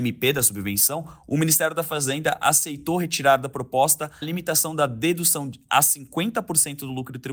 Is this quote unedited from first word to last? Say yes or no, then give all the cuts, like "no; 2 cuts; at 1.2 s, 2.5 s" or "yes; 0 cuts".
no; 1 cut; at 4.2 s